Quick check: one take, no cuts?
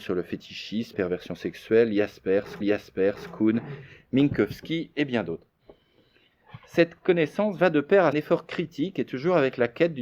no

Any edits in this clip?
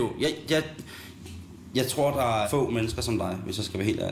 yes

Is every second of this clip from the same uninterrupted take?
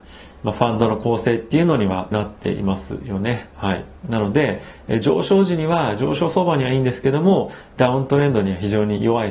no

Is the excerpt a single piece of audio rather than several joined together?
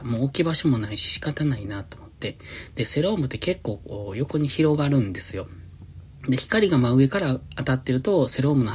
yes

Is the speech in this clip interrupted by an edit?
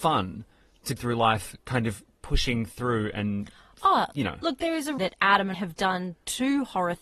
yes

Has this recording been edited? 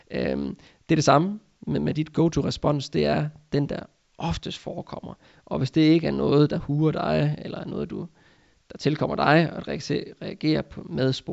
no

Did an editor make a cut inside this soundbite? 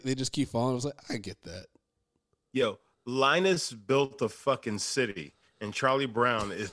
no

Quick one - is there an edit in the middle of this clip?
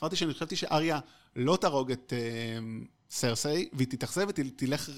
no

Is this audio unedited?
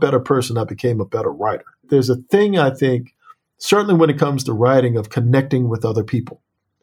yes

